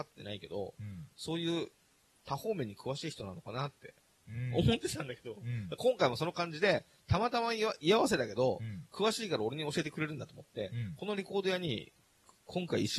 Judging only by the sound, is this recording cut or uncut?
uncut